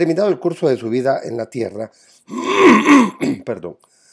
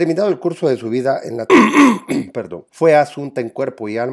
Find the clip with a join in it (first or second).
second